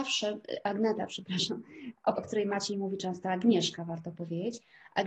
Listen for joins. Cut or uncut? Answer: cut